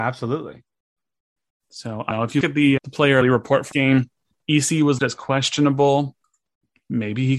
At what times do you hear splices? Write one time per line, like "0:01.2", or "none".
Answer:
0:02.1
0:02.4
0:02.8
0:03.2
0:03.7
0:05.0